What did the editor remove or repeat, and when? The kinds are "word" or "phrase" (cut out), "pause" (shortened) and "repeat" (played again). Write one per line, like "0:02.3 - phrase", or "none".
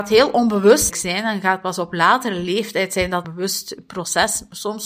0:00.9 - word
0:03.2 - phrase